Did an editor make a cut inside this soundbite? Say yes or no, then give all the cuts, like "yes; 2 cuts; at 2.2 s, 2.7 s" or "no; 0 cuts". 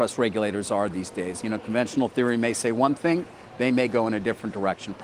no; 0 cuts